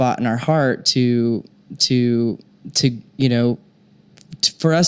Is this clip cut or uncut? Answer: cut